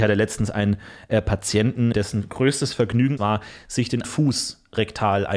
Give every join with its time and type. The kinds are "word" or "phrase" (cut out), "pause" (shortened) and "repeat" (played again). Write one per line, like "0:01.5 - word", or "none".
0:01.9 - word
0:03.2 - word
0:04.0 - word